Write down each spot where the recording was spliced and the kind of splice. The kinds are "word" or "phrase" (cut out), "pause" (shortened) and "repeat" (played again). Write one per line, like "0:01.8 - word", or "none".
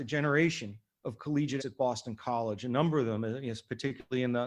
0:01.6 - word